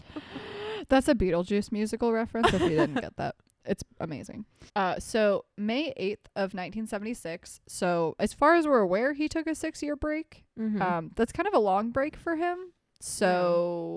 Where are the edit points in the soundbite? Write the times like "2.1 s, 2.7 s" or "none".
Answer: 4.7 s